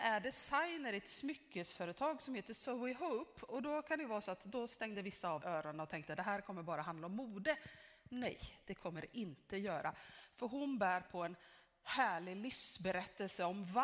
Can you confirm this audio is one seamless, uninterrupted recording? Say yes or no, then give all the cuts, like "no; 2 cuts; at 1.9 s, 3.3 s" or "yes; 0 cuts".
no; 1 cut; at 5.4 s